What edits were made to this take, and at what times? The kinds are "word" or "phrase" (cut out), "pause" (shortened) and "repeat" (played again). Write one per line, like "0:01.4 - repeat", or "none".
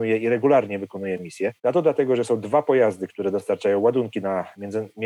0:01.6 - pause

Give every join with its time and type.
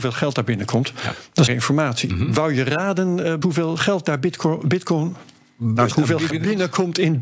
0:01.5 - word
0:03.4 - word
0:05.9 - word
0:06.3 - word

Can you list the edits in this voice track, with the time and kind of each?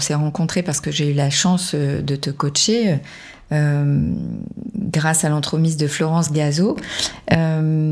none

